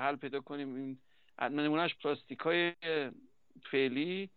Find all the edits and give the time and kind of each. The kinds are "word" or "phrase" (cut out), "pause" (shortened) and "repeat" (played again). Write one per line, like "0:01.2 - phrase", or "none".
0:01.9 - word